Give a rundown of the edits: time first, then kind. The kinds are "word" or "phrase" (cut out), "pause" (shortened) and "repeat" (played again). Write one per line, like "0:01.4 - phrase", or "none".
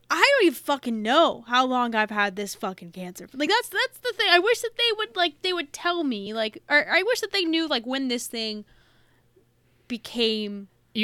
none